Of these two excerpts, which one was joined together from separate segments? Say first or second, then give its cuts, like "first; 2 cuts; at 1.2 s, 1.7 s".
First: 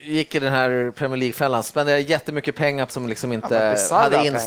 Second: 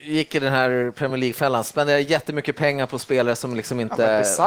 first; 1 cut; at 2.9 s